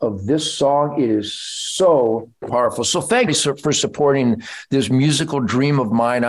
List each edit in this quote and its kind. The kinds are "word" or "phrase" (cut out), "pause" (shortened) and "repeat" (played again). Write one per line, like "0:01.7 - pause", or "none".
0:02.4 - word
0:03.3 - phrase